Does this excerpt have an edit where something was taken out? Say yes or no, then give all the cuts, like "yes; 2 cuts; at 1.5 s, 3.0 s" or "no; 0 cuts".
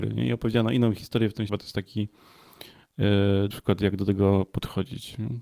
yes; 2 cuts; at 1.5 s, 3.5 s